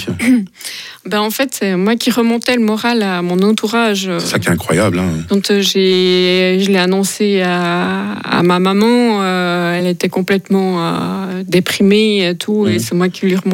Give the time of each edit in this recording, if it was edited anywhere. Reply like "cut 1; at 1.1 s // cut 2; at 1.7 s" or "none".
none